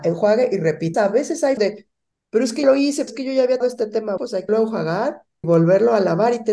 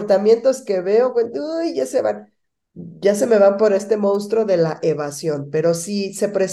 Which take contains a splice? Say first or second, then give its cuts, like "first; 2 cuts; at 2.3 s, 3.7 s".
first; 8 cuts; at 0.9 s, 1.6 s, 2.6 s, 3.1 s, 3.6 s, 4.2 s, 4.5 s, 5.4 s